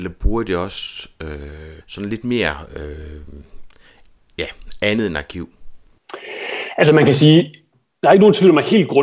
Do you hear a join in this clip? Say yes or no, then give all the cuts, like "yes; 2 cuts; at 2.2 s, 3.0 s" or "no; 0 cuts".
yes; 1 cut; at 1.8 s